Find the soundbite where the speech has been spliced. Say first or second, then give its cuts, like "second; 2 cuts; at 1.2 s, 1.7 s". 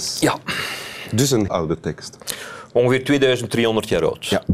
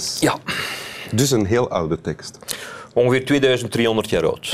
first; 1 cut; at 1.5 s